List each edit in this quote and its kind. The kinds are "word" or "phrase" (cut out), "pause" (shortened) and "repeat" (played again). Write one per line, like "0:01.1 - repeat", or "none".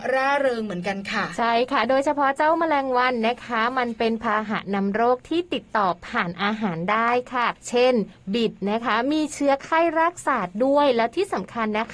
0:07.6 - pause